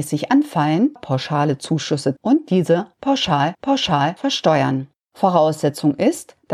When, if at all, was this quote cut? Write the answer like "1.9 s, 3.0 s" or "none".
1.0 s, 2.2 s, 3.5 s